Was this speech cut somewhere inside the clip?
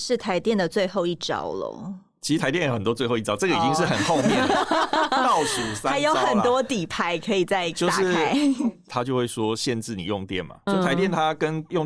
yes; 1 cut; at 10.7 s

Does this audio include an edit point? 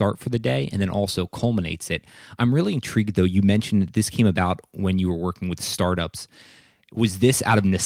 no; 0 cuts

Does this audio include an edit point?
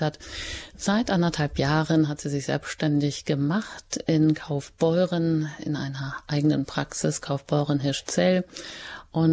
no; 0 cuts

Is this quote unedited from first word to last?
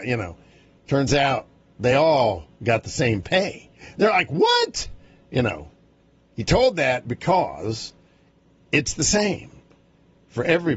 yes; 0 cuts

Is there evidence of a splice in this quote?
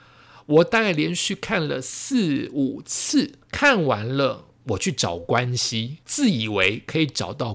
yes; 2 cuts; at 3.4 s, 6.0 s

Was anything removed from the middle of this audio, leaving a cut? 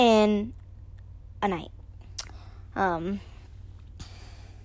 no; 0 cuts

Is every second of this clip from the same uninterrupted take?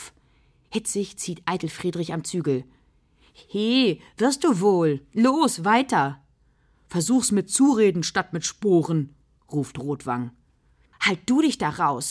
yes; 0 cuts

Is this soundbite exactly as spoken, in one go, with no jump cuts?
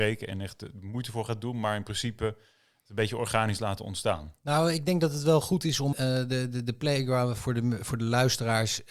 no; 1 cut; at 5.9 s

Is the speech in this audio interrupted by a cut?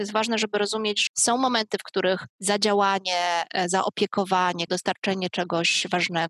yes; 3 cuts; at 1.1 s, 2.3 s, 4.7 s

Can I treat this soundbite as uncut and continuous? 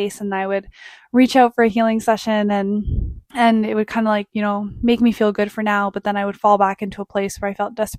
no; 1 cut; at 3.2 s

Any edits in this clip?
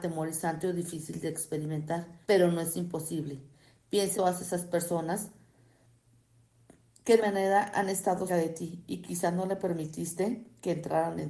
yes; 4 cuts; at 2.2 s, 4.1 s, 7.2 s, 8.3 s

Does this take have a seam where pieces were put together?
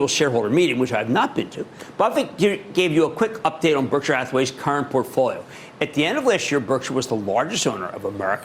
no; 0 cuts

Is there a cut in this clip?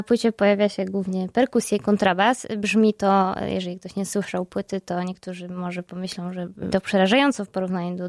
yes; 1 cut; at 6.7 s

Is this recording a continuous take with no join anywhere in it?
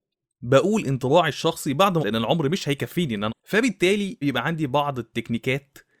no; 3 cuts; at 2.0 s, 3.3 s, 4.2 s

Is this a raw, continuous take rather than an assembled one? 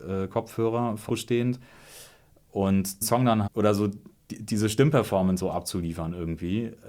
no; 4 cuts; at 1.1 s, 3.0 s, 3.5 s, 5.4 s

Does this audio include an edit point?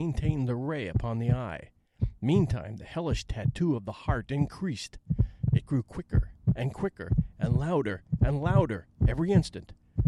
yes; 1 cut; at 8.9 s

